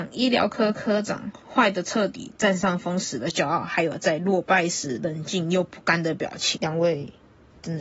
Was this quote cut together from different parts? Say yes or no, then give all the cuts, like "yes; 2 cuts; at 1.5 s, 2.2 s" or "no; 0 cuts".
yes; 1 cut; at 1.4 s